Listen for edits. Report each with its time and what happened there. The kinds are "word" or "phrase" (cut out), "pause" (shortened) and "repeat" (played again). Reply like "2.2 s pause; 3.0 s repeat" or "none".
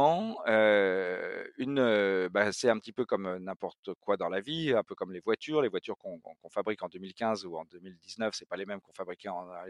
none